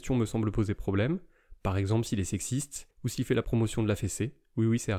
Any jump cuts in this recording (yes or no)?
no